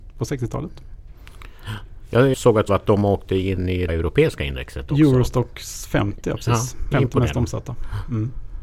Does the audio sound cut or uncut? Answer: cut